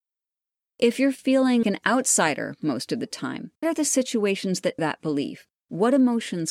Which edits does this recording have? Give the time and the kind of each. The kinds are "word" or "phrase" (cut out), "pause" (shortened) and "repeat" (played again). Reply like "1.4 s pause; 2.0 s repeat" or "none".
1.6 s word; 3.6 s word; 4.8 s word